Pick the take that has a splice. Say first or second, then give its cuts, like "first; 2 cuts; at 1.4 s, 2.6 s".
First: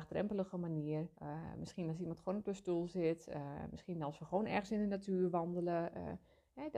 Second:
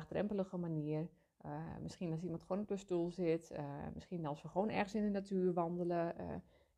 first; 1 cut; at 1.1 s